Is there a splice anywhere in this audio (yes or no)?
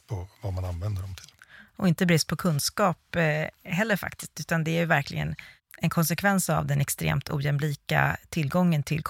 no